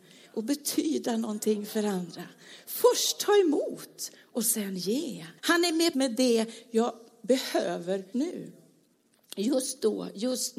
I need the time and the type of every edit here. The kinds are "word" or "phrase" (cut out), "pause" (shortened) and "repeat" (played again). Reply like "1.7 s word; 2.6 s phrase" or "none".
5.4 s pause; 5.9 s word; 8.1 s word